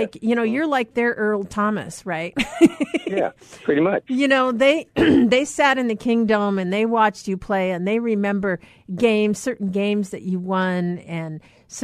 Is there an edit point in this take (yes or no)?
no